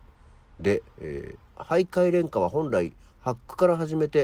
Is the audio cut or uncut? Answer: cut